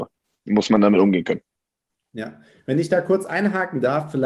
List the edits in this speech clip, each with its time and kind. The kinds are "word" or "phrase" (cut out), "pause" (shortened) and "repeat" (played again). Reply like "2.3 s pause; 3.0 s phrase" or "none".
none